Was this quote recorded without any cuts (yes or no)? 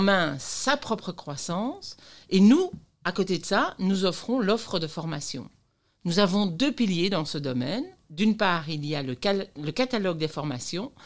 yes